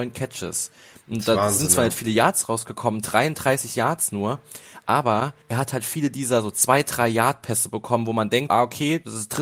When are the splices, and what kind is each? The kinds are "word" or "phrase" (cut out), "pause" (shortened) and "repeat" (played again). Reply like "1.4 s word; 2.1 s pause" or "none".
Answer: 5.4 s pause; 8.5 s word